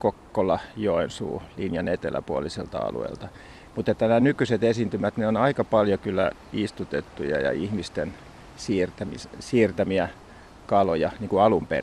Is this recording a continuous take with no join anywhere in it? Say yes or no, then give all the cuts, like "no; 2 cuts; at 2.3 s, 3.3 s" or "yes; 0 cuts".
yes; 0 cuts